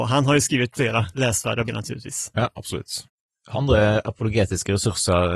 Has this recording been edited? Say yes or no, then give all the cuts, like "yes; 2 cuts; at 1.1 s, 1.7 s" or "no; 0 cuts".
yes; 3 cuts; at 1.1 s, 1.7 s, 3.5 s